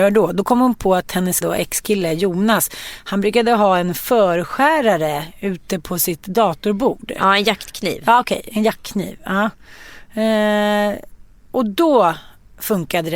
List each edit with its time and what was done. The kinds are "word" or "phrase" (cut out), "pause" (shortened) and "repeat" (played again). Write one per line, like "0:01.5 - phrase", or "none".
0:01.4 - word